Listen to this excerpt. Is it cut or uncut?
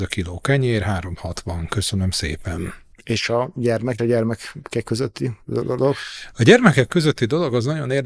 cut